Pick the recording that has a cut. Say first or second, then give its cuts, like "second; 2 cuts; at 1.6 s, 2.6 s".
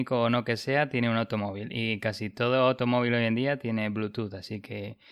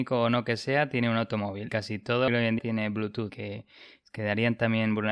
second; 4 cuts; at 1.7 s, 2.3 s, 2.6 s, 3.3 s